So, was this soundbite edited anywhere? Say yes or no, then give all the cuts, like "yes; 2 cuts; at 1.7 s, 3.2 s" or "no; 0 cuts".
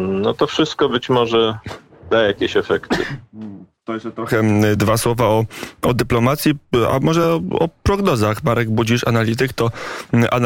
no; 0 cuts